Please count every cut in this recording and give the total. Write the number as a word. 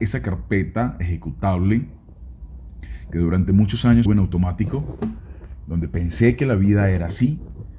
one